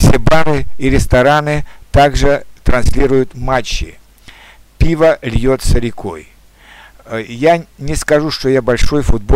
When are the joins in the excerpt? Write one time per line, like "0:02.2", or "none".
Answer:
none

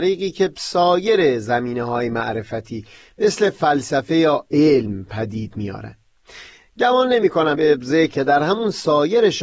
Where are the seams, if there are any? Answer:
0:07.5
0:08.1

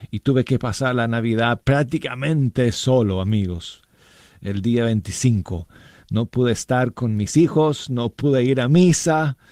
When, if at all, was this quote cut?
none

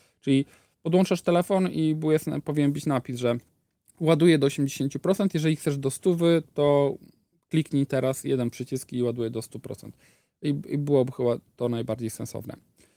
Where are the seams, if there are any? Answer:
none

